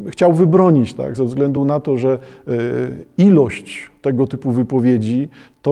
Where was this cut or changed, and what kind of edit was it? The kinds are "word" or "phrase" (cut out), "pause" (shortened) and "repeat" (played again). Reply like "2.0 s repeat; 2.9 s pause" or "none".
none